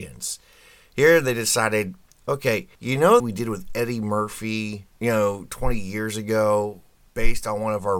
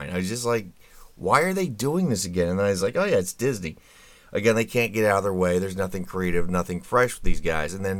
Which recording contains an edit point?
first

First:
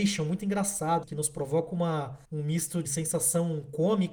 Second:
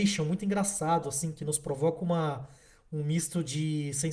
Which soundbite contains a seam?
first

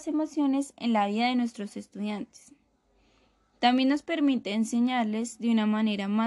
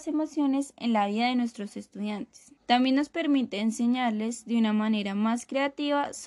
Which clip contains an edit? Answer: second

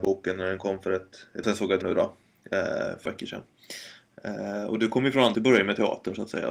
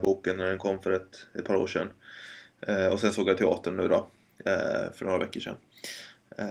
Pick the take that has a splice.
first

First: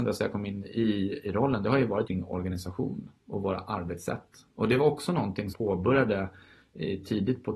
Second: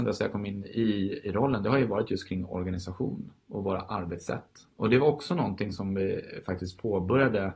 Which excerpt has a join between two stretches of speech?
first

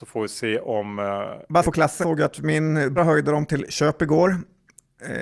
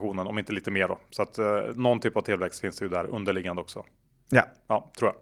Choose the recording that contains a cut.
first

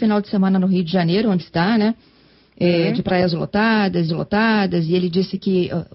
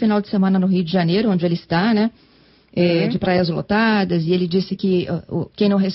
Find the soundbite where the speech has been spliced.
first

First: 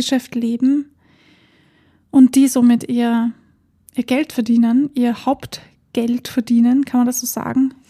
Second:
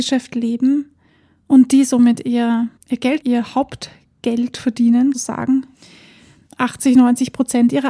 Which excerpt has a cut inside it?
second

